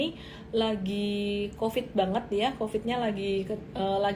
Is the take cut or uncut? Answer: uncut